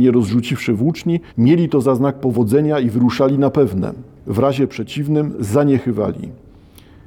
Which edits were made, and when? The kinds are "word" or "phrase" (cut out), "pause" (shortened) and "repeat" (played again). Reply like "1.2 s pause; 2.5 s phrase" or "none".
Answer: 1.3 s pause; 4.2 s pause